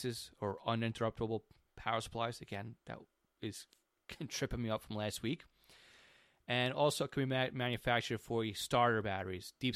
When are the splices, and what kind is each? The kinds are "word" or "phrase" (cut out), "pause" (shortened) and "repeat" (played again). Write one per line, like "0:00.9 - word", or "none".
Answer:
none